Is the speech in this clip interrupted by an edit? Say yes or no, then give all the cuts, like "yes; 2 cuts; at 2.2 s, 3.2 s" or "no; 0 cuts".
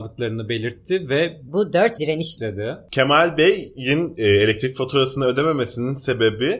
yes; 1 cut; at 2.0 s